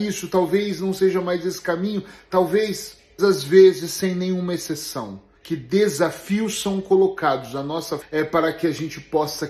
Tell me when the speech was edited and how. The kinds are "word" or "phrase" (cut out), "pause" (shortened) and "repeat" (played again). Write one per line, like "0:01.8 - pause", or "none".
0:03.2 - word
0:05.4 - pause
0:08.0 - word